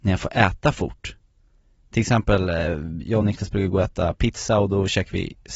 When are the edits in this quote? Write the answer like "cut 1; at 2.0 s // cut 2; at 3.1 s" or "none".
none

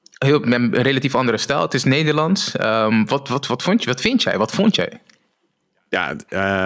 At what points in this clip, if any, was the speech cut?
none

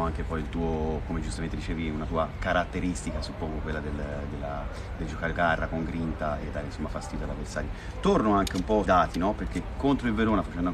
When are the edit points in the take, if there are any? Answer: cut 1; at 5.3 s // cut 2; at 8.8 s

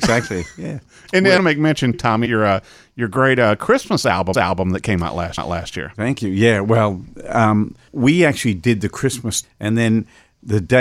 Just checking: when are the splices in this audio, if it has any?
cut 1; at 1.4 s // cut 2; at 1.9 s // cut 3; at 2.3 s // cut 4; at 4.3 s // cut 5; at 5.4 s // cut 6; at 7.9 s // cut 7; at 9.4 s

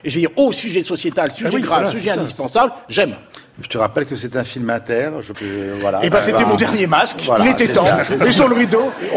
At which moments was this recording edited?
cut 1; at 5.3 s

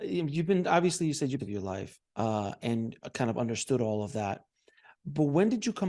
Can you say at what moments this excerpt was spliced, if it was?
cut 1; at 1.4 s // cut 2; at 2.1 s

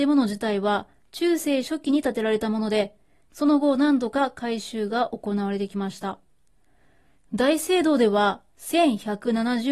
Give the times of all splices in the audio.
none

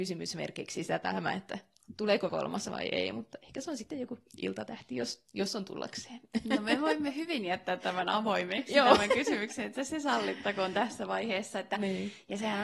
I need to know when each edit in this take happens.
cut 1; at 2.3 s

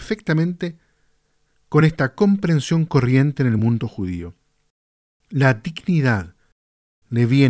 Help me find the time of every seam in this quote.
none

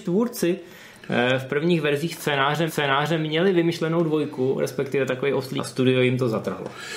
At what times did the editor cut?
cut 1; at 2.7 s // cut 2; at 5.6 s

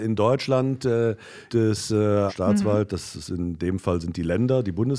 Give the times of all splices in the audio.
cut 1; at 1.5 s // cut 2; at 2.3 s

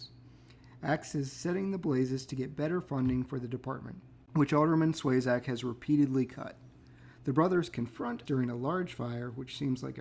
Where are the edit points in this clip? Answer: cut 1; at 8.3 s

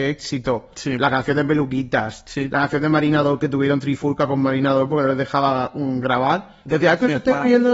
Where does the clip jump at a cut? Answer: none

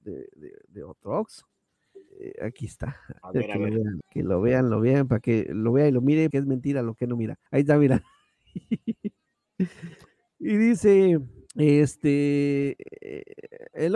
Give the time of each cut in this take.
cut 1; at 2.1 s // cut 2; at 3.2 s // cut 3; at 4.0 s // cut 4; at 6.3 s // cut 5; at 7.5 s // cut 6; at 11.5 s

